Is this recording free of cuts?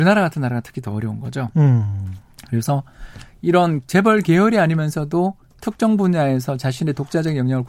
yes; 0 cuts

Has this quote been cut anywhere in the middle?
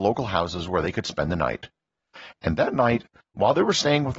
no; 0 cuts

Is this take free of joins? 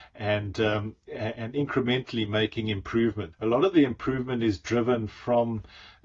no; 1 cut; at 3.3 s

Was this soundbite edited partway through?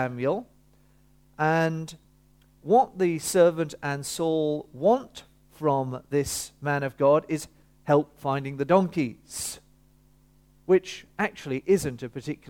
no; 0 cuts

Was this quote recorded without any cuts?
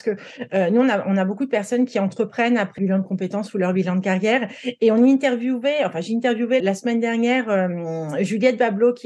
no; 2 cuts; at 2.8 s, 6.6 s

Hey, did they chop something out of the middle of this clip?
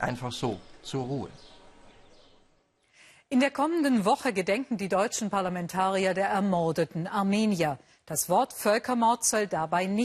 no; 0 cuts

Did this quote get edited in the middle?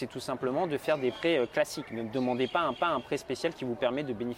yes; 1 cut; at 2.8 s

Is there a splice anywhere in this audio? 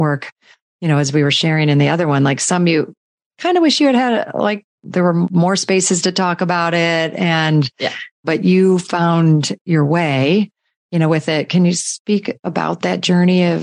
no; 0 cuts

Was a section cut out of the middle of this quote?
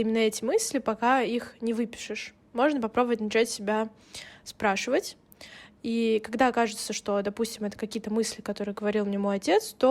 no; 0 cuts

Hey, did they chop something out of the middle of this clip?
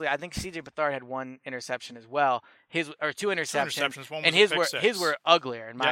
no; 0 cuts

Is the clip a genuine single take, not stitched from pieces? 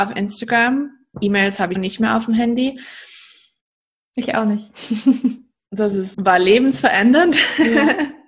no; 3 cuts; at 1.1 s, 1.8 s, 6.1 s

